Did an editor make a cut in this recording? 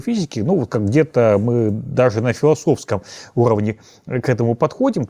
no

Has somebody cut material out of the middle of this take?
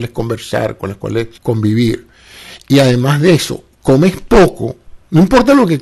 yes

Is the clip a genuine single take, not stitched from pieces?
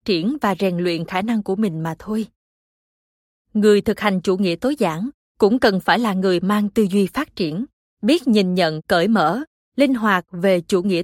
yes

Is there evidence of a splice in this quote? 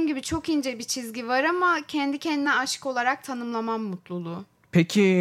no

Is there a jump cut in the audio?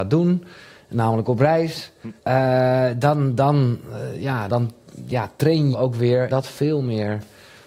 yes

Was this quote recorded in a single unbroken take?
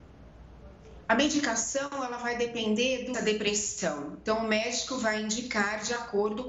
no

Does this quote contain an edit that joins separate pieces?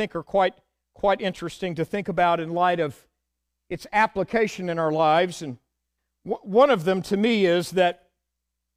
no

